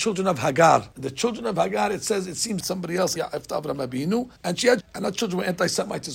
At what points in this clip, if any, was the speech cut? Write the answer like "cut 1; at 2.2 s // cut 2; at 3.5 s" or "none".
cut 1; at 0.9 s // cut 2; at 2.6 s // cut 3; at 3.2 s // cut 4; at 4.4 s // cut 5; at 4.8 s